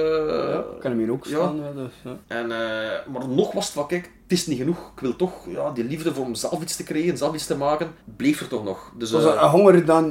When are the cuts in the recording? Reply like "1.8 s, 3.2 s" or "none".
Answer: 2.2 s, 8.0 s